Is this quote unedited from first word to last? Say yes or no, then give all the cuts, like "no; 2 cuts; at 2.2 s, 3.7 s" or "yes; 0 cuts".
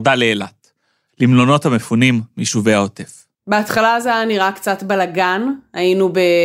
no; 1 cut; at 3.3 s